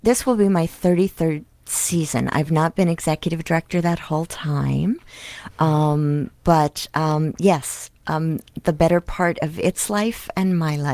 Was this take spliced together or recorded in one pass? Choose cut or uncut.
uncut